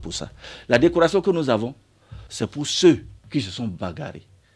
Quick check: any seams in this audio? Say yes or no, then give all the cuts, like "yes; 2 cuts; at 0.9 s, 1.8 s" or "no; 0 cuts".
yes; 2 cuts; at 2.3 s, 3.2 s